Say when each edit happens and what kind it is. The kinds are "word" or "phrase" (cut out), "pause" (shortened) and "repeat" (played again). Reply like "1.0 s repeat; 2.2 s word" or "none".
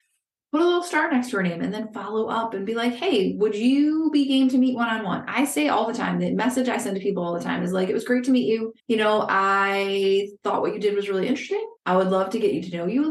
8.8 s pause; 11.8 s pause